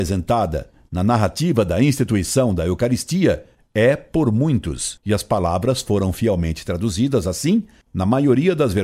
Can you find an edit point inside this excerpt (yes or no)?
no